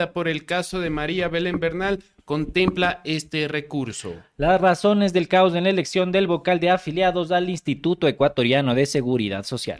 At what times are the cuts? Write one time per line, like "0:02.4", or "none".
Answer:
none